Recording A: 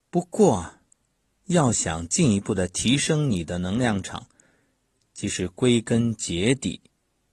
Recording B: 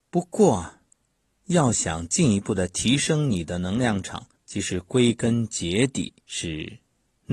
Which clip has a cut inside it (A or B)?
B